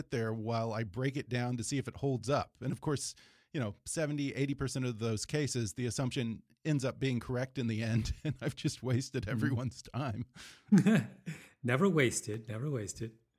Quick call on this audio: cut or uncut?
uncut